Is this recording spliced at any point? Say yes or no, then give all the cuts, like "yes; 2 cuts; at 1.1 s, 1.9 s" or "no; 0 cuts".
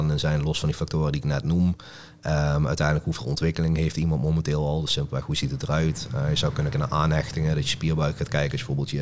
yes; 1 cut; at 6.7 s